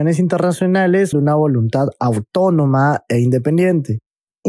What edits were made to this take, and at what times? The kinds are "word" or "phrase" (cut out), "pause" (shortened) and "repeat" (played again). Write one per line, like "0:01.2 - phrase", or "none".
0:01.1 - word